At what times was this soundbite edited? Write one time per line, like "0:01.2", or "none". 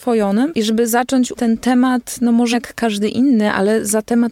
0:01.4
0:02.5